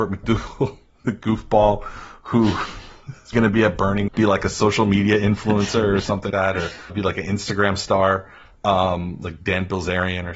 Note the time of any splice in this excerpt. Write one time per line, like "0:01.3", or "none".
0:03.3
0:04.1
0:06.3
0:06.9